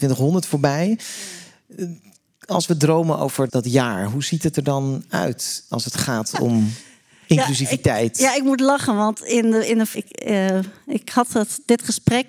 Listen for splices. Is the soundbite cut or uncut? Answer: cut